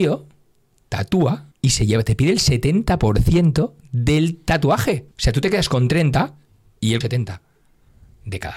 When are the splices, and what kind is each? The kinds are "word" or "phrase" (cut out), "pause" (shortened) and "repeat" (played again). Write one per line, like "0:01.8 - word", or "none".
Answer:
0:01.5 - pause
0:05.1 - pause
0:07.0 - word